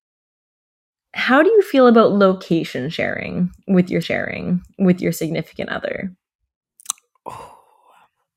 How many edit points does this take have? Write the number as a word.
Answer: one